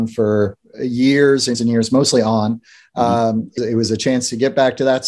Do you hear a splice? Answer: yes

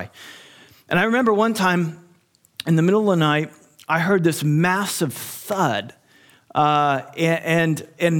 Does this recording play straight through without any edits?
yes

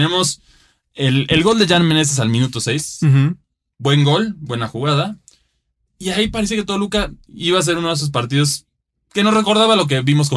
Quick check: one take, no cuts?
yes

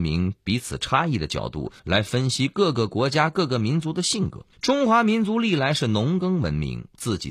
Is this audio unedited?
no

